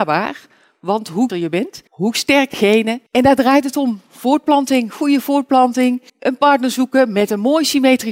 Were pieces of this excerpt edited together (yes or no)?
yes